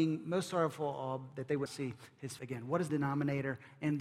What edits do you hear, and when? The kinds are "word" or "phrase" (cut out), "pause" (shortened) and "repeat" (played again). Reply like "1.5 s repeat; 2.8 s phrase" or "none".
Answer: 1.7 s word; 2.4 s word; 2.9 s word